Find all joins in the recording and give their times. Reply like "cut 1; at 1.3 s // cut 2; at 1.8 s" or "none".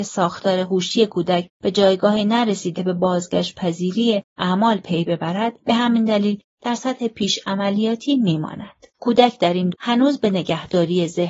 cut 1; at 1.5 s // cut 2; at 2.8 s // cut 3; at 4.3 s // cut 4; at 5.6 s // cut 5; at 8.9 s // cut 6; at 9.7 s